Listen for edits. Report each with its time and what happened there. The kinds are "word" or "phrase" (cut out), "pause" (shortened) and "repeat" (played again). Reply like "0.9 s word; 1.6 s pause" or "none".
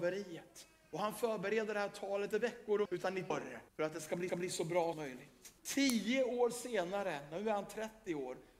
2.3 s word; 2.9 s word; 3.3 s word; 3.7 s pause; 4.3 s repeat; 4.9 s word; 5.6 s pause

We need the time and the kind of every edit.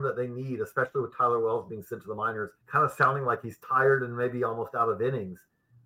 2.6 s pause

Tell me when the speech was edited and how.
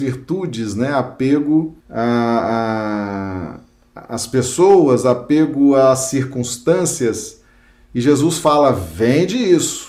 1.8 s pause

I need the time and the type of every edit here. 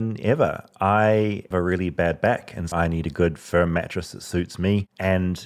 1.5 s word; 2.7 s word

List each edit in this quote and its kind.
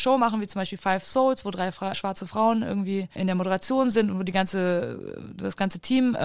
1.9 s word

